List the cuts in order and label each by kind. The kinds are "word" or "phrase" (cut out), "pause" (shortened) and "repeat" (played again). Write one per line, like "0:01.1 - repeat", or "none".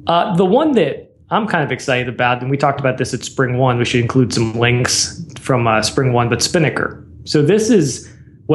none